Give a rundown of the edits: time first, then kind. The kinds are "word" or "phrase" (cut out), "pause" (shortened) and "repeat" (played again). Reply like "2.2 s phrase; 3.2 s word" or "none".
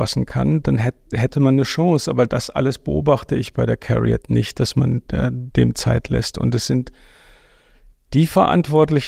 none